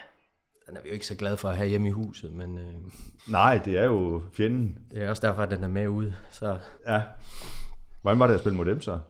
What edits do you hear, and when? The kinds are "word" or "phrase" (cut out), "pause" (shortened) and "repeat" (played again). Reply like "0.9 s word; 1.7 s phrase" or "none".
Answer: 3.2 s pause; 6.8 s pause